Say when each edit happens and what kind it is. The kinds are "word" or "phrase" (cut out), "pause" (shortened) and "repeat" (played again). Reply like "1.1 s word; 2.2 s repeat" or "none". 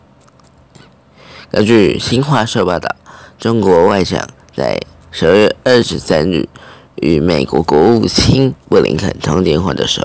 8.6 s pause